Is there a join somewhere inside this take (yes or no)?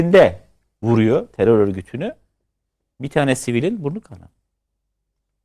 no